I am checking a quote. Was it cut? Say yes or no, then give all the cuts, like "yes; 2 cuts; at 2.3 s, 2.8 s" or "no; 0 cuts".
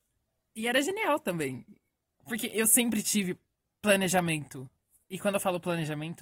no; 0 cuts